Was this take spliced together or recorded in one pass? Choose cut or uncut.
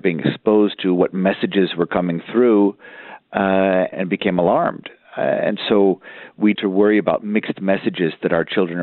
cut